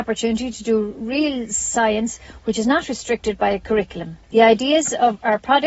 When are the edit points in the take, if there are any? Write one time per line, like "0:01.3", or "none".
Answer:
0:04.2